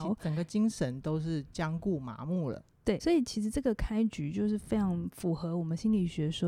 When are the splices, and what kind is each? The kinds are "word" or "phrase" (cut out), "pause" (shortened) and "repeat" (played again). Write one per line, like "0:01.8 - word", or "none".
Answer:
0:03.0 - word

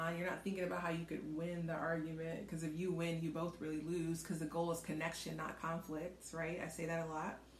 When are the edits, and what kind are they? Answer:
none

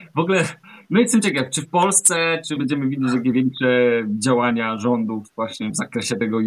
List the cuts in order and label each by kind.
0:02.6 - phrase
0:03.2 - word

